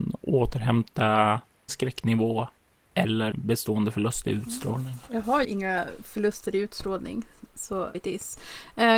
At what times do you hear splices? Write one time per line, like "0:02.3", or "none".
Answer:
0:01.7
0:03.3
0:05.4
0:07.9